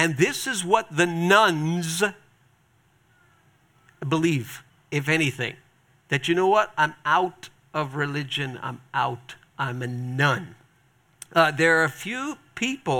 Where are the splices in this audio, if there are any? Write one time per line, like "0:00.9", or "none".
0:04.7